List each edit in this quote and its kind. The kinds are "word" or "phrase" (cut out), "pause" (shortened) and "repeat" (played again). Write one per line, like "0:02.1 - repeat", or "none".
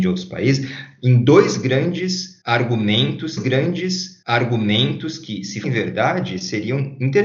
0:03.4 - repeat
0:05.6 - word